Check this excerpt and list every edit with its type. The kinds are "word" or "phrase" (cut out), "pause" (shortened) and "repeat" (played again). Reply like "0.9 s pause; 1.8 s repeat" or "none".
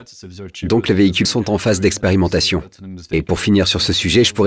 1.2 s word